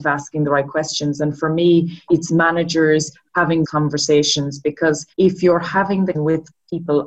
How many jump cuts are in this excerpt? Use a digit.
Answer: 4